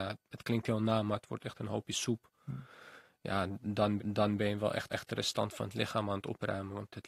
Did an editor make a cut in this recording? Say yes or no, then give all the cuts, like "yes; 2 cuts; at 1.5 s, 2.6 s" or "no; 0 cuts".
yes; 2 cuts; at 4.0 s, 4.9 s